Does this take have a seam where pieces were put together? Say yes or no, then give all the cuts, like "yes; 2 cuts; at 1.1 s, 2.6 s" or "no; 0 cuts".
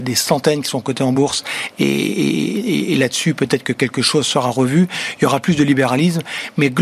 no; 0 cuts